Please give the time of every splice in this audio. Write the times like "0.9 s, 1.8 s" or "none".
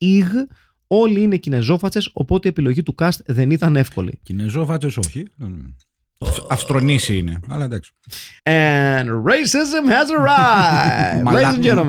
8.4 s